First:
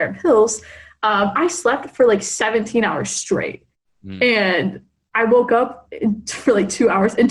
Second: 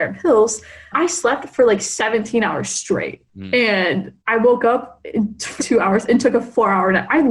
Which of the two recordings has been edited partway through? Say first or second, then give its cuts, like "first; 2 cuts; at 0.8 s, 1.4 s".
second; 4 cuts; at 0.9 s, 3.3 s, 4.2 s, 5.6 s